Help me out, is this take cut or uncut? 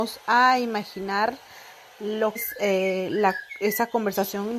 cut